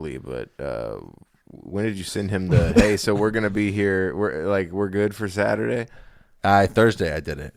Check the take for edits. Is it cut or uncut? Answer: uncut